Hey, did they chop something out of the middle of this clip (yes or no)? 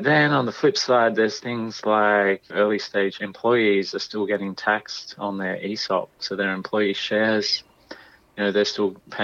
no